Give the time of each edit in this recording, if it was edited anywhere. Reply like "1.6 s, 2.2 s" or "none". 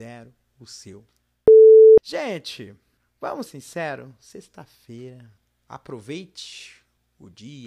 3.5 s